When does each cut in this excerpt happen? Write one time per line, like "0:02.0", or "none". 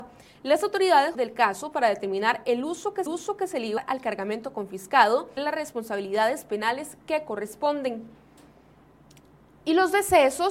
0:01.1
0:03.1
0:03.8
0:05.4